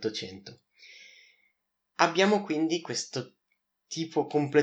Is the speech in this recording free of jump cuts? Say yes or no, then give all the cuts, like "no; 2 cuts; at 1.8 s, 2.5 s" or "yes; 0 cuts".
yes; 0 cuts